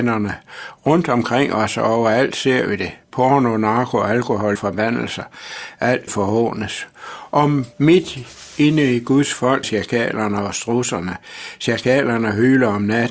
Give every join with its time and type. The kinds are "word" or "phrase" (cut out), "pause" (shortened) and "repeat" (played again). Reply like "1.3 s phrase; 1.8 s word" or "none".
4.6 s phrase; 6.1 s phrase; 7.7 s pause; 9.6 s word